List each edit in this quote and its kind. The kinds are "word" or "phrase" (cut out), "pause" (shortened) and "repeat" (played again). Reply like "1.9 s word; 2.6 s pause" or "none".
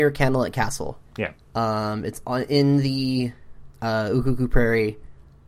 1.1 s pause